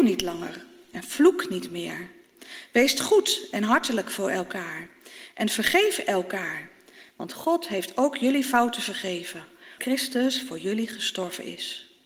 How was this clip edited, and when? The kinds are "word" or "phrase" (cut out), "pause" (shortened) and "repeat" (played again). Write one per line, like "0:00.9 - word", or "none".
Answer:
0:09.8 - word